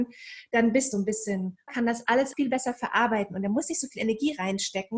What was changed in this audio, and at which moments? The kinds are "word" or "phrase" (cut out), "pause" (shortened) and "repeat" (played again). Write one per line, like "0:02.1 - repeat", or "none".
0:00.9 - phrase
0:01.7 - phrase
0:02.3 - word